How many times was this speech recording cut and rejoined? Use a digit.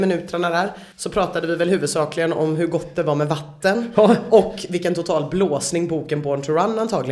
1